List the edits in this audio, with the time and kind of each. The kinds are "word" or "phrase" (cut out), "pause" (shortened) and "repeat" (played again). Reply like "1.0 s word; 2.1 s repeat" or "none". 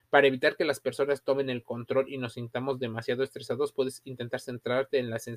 none